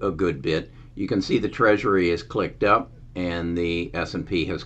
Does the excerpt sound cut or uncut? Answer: uncut